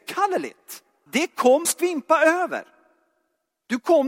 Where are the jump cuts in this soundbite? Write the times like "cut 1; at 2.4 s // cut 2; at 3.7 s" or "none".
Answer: cut 1; at 1.1 s // cut 2; at 1.6 s